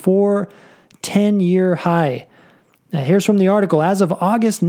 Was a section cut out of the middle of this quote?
no; 0 cuts

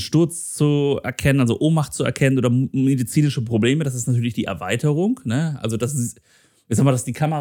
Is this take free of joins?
yes; 0 cuts

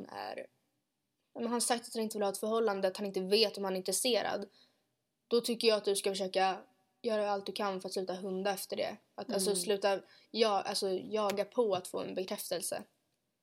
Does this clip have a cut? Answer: no; 0 cuts

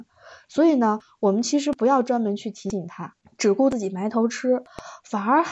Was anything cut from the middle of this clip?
yes; 1 cut; at 3.2 s

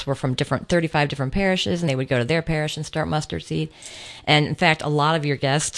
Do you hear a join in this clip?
yes; 1 cut; at 1.9 s

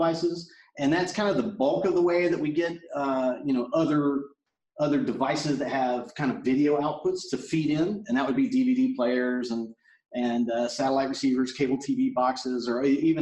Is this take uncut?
yes; 0 cuts

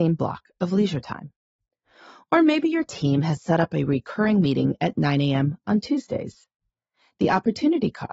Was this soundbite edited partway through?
no; 0 cuts

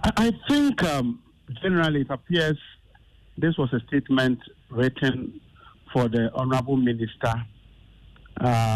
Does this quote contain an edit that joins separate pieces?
no; 0 cuts

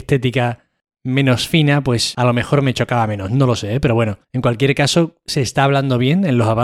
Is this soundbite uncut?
no; 1 cut; at 4.2 s

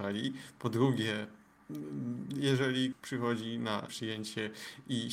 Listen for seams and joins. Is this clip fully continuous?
no; 2 cuts; at 2.9 s, 3.9 s

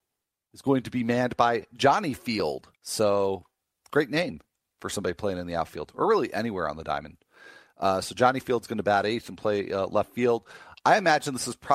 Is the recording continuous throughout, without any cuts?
no; 1 cut; at 2.8 s

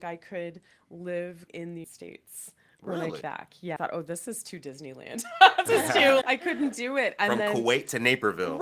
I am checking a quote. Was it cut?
yes; 6 cuts; at 1.5 s, 1.8 s, 3.2 s, 3.8 s, 5.7 s, 6.2 s

